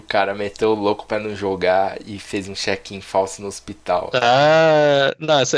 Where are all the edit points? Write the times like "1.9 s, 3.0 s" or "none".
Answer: none